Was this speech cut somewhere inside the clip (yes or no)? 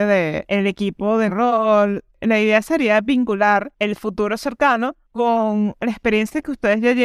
yes